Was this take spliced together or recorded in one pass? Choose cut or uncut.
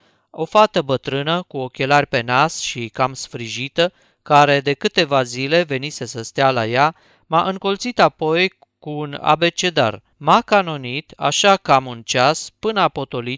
uncut